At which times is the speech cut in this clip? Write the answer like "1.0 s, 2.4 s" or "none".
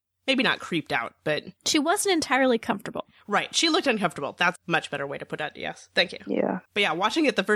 1.6 s, 4.6 s, 6.7 s